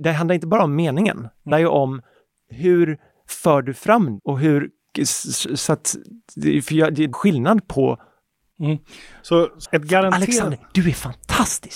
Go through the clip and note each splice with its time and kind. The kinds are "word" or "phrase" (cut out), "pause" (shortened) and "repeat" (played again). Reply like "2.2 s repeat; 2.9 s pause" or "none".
1.5 s word; 4.2 s word; 7.1 s word; 9.6 s word